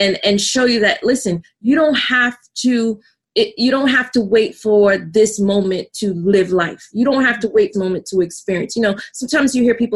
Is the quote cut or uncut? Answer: cut